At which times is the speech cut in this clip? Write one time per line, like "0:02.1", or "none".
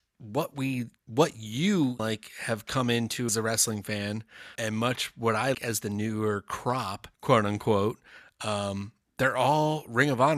0:01.0
0:02.0
0:03.3
0:04.6
0:05.5
0:07.1